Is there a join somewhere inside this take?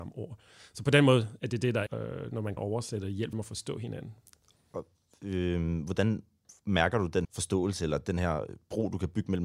yes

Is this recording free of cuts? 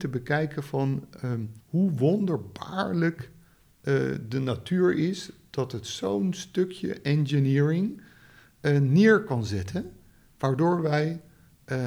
no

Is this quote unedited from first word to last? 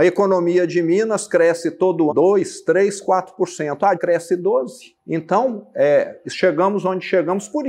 no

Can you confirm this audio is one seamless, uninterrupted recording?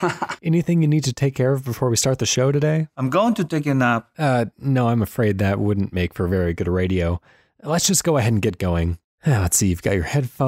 yes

